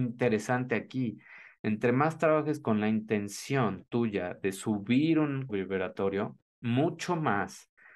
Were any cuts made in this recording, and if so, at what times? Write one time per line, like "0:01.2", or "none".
0:05.5